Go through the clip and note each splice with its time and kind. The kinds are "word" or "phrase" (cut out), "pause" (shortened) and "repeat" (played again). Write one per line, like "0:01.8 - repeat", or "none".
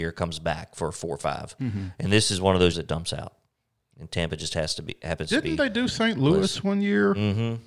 0:02.7 - word